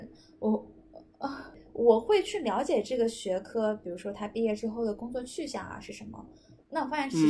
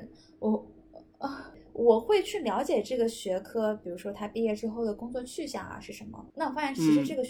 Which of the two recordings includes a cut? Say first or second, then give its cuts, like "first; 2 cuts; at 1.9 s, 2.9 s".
second; 1 cut; at 6.3 s